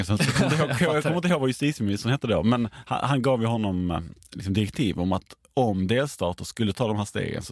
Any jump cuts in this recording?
no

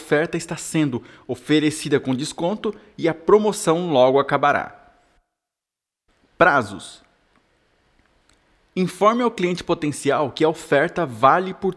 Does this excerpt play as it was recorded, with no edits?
yes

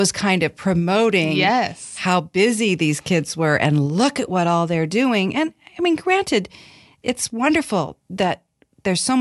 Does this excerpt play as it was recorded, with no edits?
yes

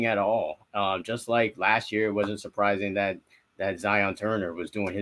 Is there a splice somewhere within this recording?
no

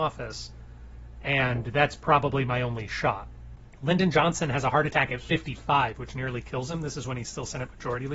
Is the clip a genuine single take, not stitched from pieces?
yes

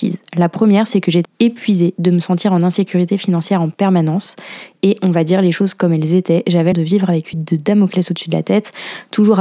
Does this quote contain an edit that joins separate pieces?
yes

